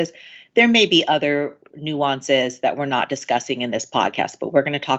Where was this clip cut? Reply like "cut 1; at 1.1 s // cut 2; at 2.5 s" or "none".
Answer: none